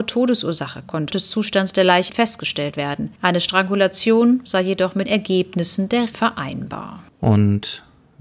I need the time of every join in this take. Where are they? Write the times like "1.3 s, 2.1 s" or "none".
1.1 s, 2.1 s, 3.2 s, 5.0 s, 6.1 s, 7.1 s